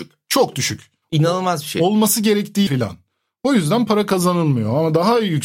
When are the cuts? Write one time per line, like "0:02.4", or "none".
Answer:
0:02.7